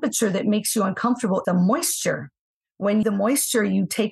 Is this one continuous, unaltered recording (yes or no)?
no